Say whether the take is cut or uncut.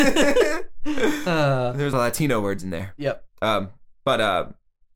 cut